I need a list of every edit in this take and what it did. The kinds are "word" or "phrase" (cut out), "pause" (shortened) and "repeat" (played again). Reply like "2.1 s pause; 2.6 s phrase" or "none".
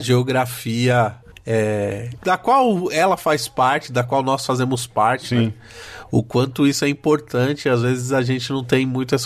none